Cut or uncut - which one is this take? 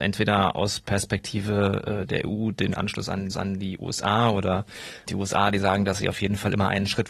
cut